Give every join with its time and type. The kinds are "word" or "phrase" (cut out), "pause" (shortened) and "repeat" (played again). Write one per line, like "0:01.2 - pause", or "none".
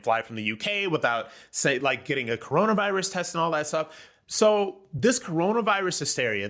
none